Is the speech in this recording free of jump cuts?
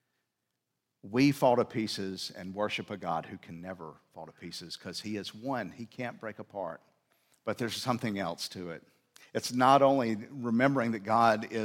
no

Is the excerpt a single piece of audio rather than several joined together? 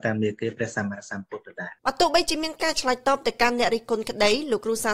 no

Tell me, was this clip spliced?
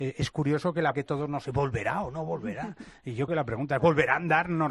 yes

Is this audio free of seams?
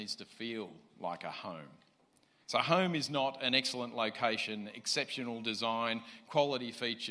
yes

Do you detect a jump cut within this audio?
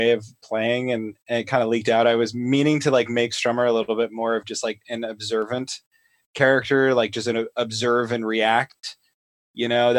no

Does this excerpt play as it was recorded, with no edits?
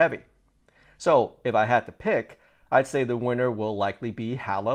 yes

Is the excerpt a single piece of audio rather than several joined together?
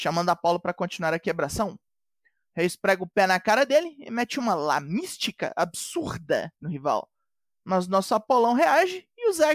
yes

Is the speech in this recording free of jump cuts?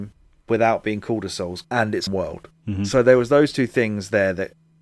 no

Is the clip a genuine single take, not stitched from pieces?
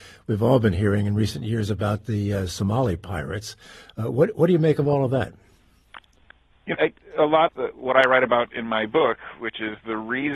no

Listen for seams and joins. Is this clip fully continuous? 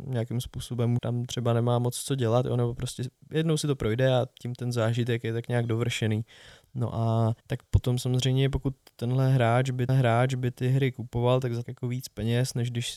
no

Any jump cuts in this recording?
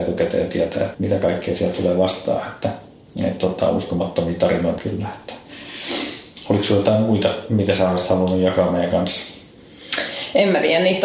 yes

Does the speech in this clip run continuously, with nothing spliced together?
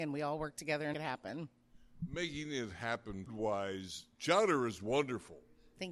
no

